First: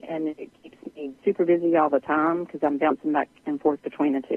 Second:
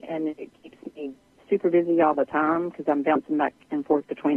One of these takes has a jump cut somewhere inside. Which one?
first; 1 cut; at 1.2 s

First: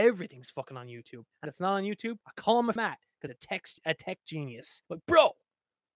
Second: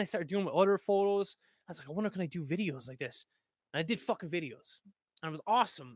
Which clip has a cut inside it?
first; 6 cuts; at 1.4 s, 2.2 s, 2.8 s, 3.3 s, 3.8 s, 4.9 s

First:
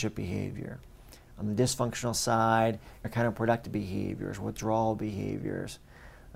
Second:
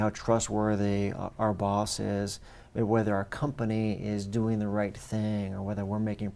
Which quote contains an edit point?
first; 1 cut; at 3.0 s

